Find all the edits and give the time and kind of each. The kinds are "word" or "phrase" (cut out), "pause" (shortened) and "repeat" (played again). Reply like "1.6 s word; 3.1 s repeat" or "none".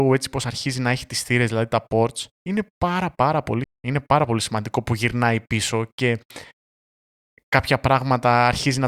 2.3 s pause; 3.6 s word